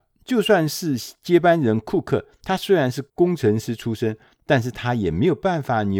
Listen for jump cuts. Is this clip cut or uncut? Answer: cut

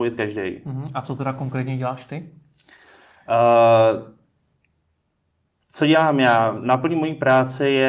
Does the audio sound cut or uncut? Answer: uncut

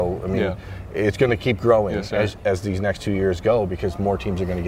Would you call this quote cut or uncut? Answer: uncut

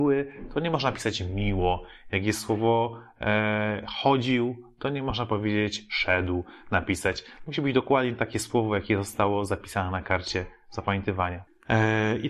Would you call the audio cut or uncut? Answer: uncut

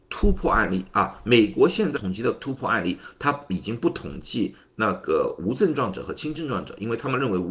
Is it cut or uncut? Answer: cut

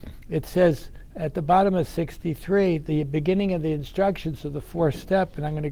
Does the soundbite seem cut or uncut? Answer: uncut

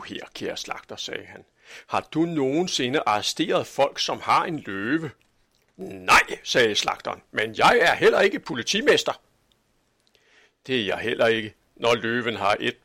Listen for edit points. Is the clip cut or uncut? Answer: uncut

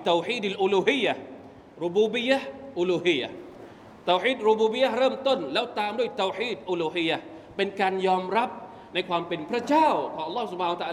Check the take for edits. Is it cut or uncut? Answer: uncut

